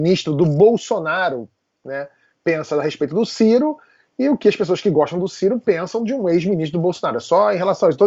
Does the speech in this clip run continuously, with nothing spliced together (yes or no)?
yes